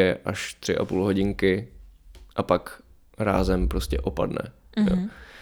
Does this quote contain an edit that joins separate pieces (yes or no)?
no